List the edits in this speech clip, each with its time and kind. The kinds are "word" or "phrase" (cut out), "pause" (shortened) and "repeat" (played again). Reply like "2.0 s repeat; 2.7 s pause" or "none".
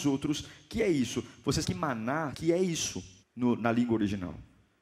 1.6 s word; 2.3 s word; 3.2 s pause